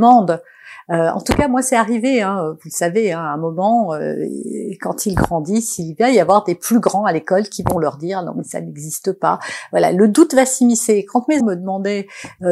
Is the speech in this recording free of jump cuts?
no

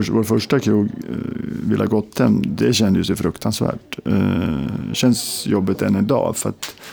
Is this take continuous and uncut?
yes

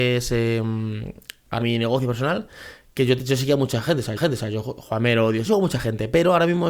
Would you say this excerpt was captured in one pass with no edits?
no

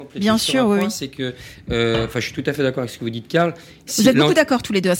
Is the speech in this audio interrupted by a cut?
no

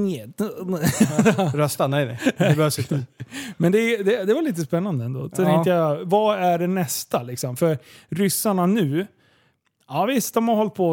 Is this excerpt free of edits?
yes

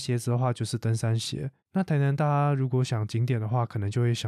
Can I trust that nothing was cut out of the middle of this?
no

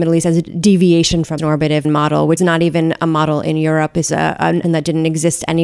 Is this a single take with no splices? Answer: no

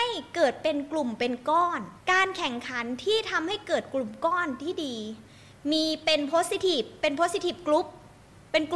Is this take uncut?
no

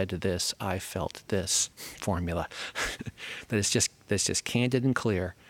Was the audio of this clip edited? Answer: yes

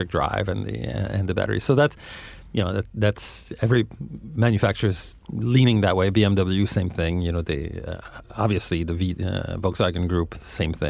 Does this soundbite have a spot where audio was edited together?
yes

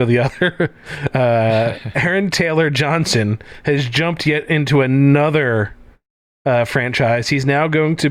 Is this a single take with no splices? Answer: yes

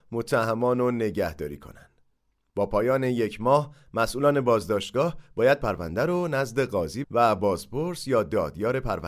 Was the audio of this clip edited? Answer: yes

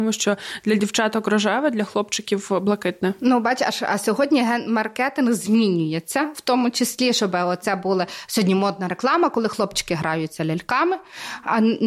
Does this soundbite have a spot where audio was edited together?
no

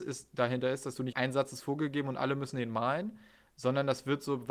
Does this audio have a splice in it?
yes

